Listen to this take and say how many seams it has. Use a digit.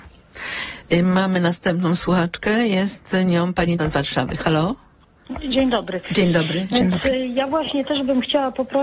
1